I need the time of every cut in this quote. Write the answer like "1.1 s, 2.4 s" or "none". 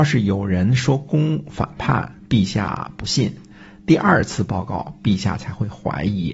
none